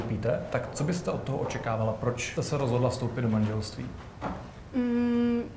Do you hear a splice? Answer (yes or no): yes